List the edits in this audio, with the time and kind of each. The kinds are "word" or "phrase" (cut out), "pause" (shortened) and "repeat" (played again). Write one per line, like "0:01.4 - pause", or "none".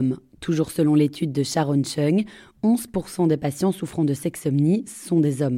none

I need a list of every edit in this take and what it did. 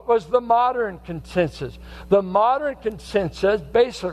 none

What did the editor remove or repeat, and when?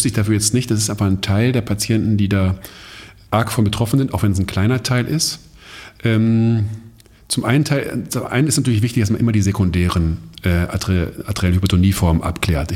none

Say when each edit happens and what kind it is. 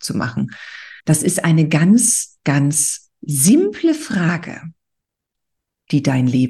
0:01.0 - pause

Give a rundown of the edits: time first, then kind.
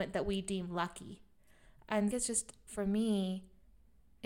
0:02.1 - phrase

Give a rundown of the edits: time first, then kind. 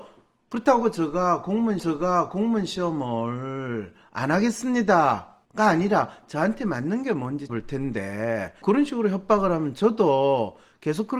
0:01.8 - repeat
0:05.4 - pause
0:07.5 - word
0:08.6 - word

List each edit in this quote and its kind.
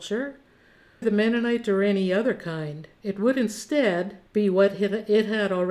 0:01.0 - word
0:04.3 - pause

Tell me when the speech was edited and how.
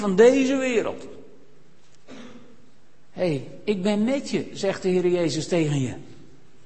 none

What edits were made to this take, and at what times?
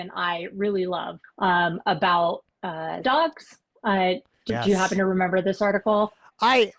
0:01.2 - phrase
0:03.0 - word
0:04.5 - word

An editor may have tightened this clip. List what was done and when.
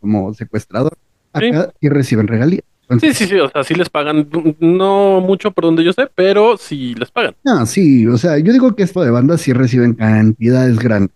0:01.1 - pause
0:01.8 - pause
0:02.7 - pause
0:07.4 - pause
0:09.0 - word

